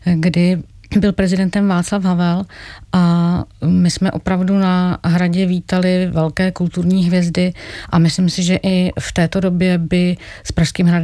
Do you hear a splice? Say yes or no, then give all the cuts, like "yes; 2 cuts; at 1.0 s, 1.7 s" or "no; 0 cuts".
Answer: no; 0 cuts